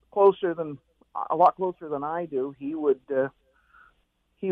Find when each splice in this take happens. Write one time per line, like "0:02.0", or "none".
none